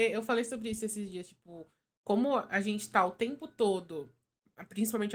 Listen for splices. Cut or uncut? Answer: uncut